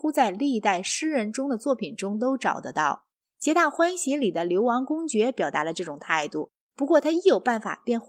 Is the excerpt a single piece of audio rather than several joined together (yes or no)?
yes